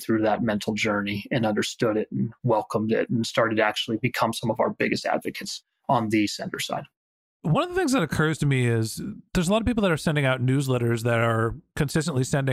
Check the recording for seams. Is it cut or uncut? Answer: uncut